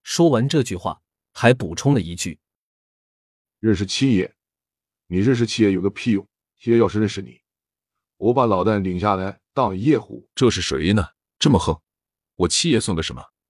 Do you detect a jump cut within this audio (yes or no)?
yes